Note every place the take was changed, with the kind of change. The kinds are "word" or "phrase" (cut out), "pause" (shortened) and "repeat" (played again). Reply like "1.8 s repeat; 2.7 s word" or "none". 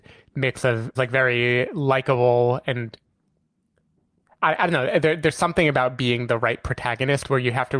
1.0 s word